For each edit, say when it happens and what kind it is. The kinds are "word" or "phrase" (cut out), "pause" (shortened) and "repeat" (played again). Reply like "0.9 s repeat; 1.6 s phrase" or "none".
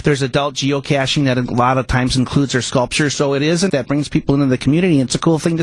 3.7 s word